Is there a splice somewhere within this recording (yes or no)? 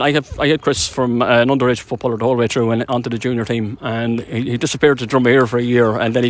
no